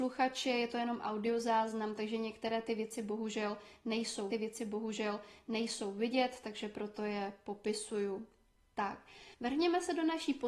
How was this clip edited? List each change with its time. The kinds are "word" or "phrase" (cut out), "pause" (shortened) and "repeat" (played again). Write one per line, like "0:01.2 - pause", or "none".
0:04.3 - repeat
0:09.3 - pause

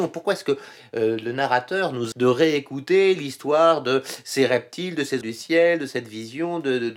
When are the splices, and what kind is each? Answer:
0:02.1 - word
0:05.2 - word

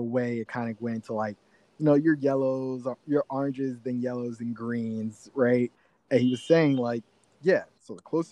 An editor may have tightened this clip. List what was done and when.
none

